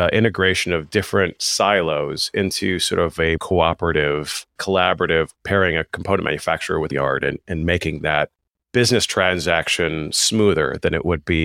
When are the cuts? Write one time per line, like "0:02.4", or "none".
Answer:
0:03.4
0:04.6
0:05.4
0:06.9